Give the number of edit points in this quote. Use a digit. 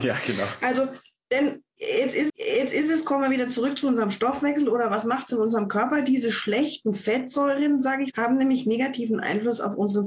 2